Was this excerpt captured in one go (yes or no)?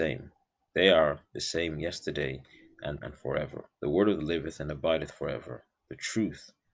no